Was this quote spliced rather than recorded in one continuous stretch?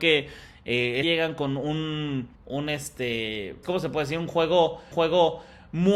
yes; 4 cuts; at 1.0 s, 2.3 s, 3.6 s, 4.9 s

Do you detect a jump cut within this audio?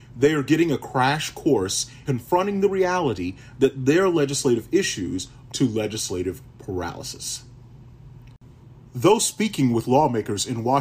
yes; 2 cuts; at 2.1 s, 5.5 s

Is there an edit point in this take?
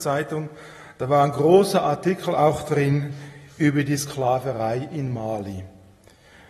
no; 0 cuts

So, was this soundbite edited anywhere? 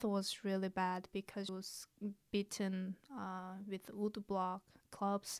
yes; 1 cut; at 1.5 s

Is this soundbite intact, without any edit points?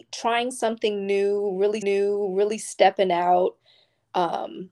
no; 1 cut; at 1.8 s

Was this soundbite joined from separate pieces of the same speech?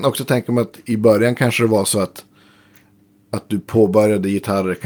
no; 0 cuts

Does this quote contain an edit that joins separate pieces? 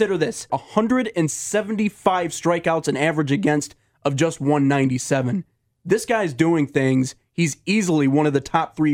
no; 0 cuts

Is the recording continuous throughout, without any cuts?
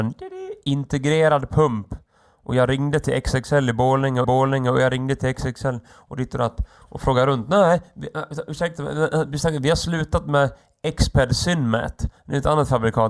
no; 1 cut; at 4.2 s

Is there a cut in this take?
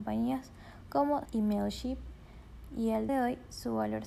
yes; 2 cuts; at 1.2 s, 3.1 s

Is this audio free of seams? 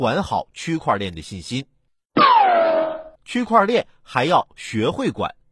no; 1 cut; at 3.2 s

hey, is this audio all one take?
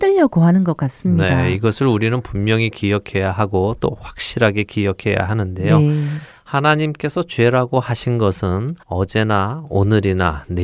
no; 1 cut; at 8.8 s

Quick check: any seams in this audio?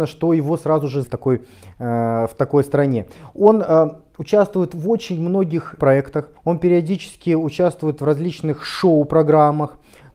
yes; 3 cuts; at 1.0 s, 5.8 s, 6.4 s

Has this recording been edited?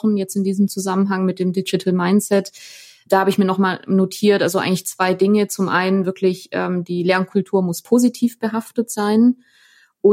no; 0 cuts

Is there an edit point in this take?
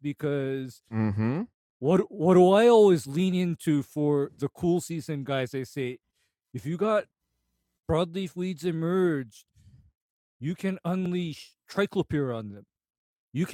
no; 0 cuts

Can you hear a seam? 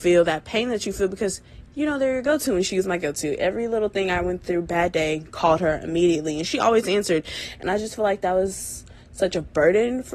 no; 0 cuts

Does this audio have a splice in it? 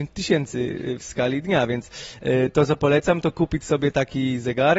no; 0 cuts

